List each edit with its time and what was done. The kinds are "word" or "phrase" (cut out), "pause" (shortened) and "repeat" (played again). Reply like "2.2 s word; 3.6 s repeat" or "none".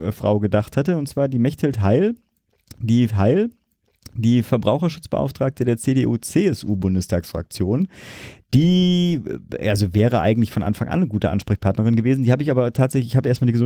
3.1 s repeat